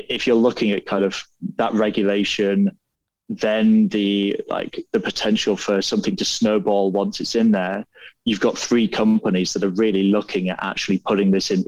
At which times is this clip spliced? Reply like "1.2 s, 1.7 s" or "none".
none